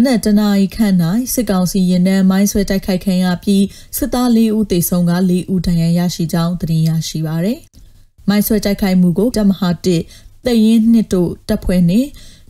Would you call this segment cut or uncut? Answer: cut